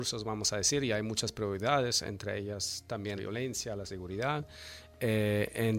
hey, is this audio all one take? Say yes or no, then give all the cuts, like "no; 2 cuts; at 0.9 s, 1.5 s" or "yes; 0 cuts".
no; 1 cut; at 3.2 s